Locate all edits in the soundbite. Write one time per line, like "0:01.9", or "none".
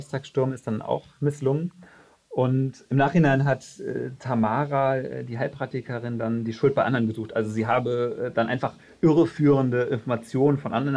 none